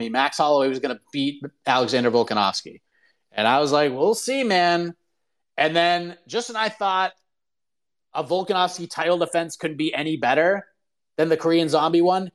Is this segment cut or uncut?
uncut